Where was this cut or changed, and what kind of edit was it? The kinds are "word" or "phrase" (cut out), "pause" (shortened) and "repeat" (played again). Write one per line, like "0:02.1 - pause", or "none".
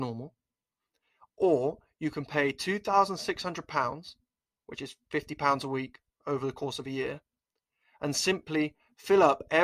none